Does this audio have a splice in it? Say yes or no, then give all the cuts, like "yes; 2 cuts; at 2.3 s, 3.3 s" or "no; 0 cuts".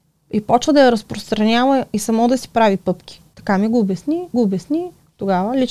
yes; 1 cut; at 4.3 s